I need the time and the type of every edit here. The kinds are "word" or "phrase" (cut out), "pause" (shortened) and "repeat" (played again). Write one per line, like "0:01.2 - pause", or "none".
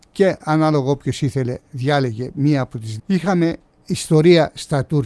0:03.0 - phrase